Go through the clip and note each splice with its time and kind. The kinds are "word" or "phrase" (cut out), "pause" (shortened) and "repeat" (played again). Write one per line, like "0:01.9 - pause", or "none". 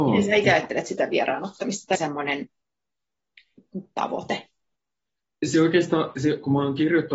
0:01.9 - phrase